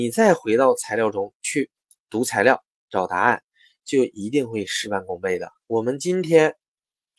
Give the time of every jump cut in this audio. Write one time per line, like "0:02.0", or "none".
0:05.6